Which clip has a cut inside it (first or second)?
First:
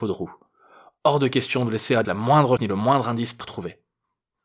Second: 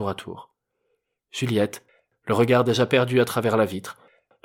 first